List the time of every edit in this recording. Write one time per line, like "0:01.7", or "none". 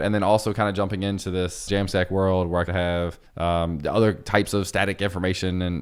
0:01.7
0:02.7
0:03.3